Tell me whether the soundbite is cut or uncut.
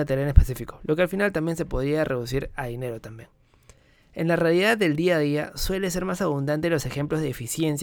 uncut